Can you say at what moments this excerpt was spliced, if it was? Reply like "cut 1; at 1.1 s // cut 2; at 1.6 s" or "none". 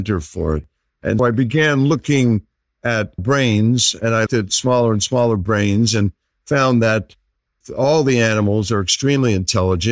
cut 1; at 1.2 s // cut 2; at 3.2 s // cut 3; at 4.3 s